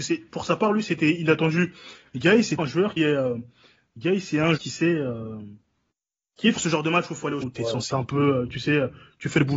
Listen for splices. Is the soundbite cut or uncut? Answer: cut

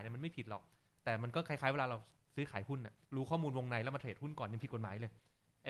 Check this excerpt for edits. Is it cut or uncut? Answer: cut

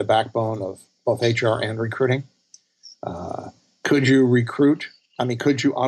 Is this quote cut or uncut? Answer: uncut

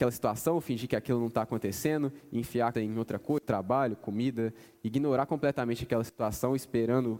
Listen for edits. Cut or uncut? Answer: cut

